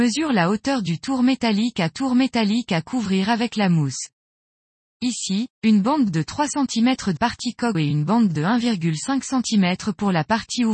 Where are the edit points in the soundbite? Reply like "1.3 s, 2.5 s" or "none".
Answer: 1.9 s, 5.5 s, 7.2 s, 7.7 s